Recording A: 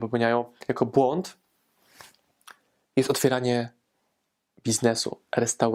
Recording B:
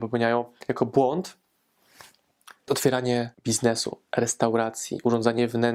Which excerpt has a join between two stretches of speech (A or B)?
B